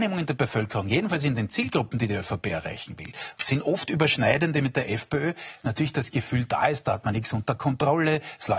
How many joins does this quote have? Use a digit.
0